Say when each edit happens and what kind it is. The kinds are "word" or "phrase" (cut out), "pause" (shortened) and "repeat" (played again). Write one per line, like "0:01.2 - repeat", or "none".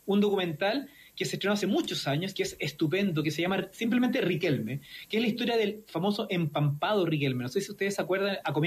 none